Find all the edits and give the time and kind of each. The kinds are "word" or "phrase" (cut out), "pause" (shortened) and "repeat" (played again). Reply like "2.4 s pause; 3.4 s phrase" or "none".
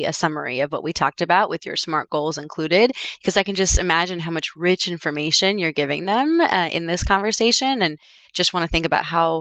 none